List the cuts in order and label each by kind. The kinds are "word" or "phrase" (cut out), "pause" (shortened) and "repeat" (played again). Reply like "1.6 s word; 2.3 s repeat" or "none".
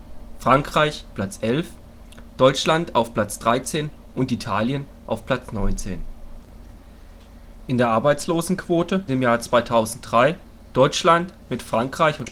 1.1 s word; 9.1 s word